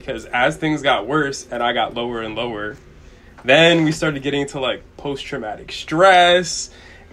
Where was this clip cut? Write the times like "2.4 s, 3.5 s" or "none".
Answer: none